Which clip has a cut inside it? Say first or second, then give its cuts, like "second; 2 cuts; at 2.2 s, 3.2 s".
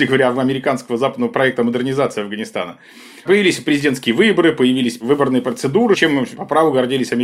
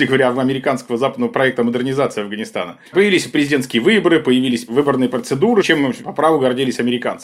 second; 1 cut; at 2.9 s